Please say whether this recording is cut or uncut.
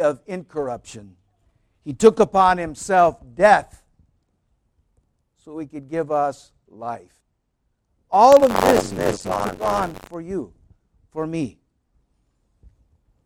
uncut